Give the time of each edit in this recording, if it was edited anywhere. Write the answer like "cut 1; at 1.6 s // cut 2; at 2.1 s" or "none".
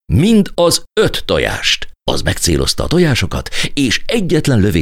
cut 1; at 2.0 s

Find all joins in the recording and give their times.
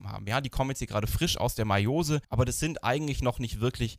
cut 1; at 2.2 s

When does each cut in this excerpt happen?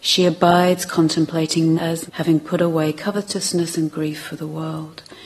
cut 1; at 1.7 s // cut 2; at 2.1 s

